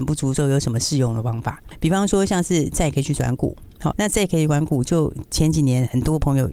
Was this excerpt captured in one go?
no; 1 cut; at 3.9 s

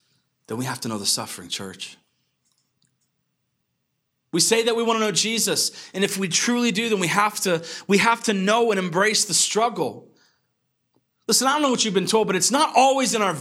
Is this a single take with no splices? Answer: yes; 0 cuts

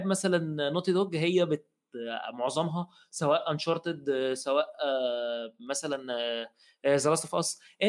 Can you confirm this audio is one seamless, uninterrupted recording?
yes; 0 cuts

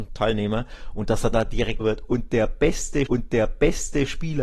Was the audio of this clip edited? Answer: yes; 3 cuts; at 1.3 s, 1.8 s, 3.1 s

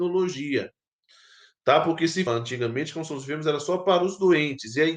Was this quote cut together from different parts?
yes; 1 cut; at 2.3 s

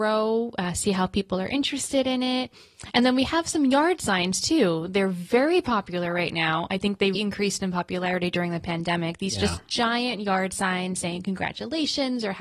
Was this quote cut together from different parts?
yes; 1 cut; at 7.1 s

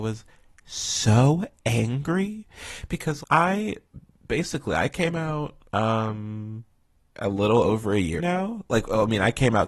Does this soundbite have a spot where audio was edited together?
yes; 3 cuts; at 3.2 s, 7.1 s, 8.2 s

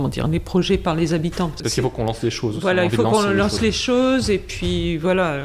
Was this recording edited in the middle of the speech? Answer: no; 0 cuts

